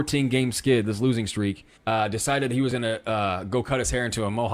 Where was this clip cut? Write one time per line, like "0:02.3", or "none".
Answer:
0:01.8